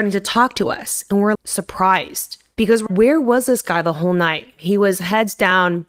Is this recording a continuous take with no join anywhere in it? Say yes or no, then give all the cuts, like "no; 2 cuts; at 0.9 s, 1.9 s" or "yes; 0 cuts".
no; 2 cuts; at 1.3 s, 2.9 s